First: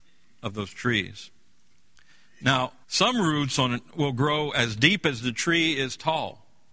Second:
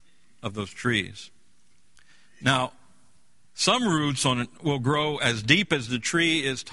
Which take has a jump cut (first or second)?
first